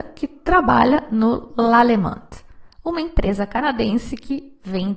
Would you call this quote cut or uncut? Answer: uncut